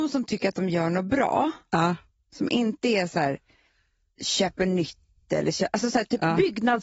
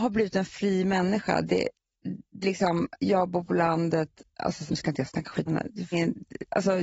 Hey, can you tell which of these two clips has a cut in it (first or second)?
second